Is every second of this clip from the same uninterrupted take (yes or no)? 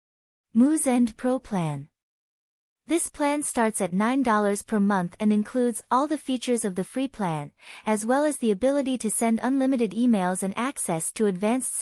yes